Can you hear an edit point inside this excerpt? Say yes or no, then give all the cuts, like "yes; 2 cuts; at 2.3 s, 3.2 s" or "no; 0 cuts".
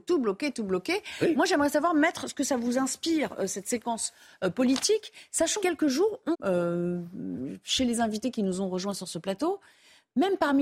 yes; 2 cuts; at 5.6 s, 6.3 s